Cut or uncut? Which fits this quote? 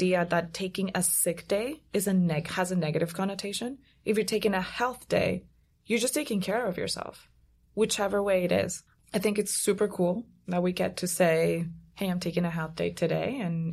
cut